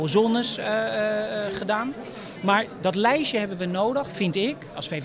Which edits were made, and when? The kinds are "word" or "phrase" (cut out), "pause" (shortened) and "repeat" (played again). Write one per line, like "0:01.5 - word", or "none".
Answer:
none